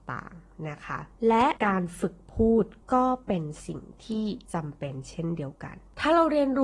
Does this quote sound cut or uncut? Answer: cut